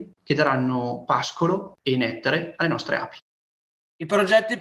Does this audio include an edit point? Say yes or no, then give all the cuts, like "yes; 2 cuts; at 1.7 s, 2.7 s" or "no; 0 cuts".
no; 0 cuts